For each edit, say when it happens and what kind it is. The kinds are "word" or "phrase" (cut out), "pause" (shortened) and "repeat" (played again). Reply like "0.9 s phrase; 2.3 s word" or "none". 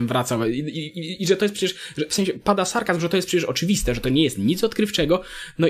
none

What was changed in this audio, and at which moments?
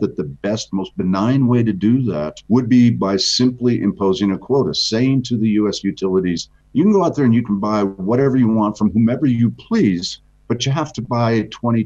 2.4 s pause; 6.6 s pause

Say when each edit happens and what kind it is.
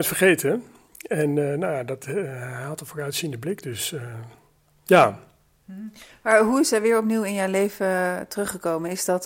none

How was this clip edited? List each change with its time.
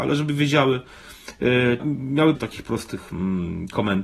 1.8 s word; 2.4 s word

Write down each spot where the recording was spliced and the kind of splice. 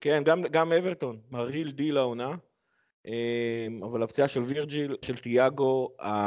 1.3 s word; 5.0 s word

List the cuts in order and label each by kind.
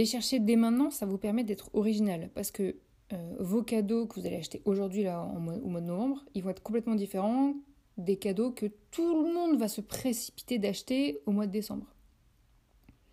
none

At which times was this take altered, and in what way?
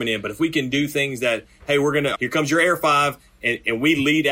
2.1 s word

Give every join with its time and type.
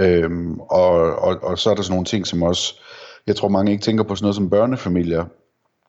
none

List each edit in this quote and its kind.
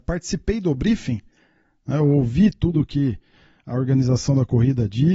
none

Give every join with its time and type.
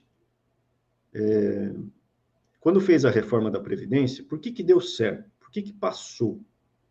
5.4 s pause

